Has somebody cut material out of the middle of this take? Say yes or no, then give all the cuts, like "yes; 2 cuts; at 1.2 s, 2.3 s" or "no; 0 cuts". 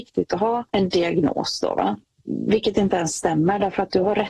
no; 0 cuts